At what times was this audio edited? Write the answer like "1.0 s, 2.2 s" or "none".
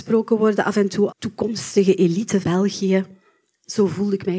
1.1 s, 2.4 s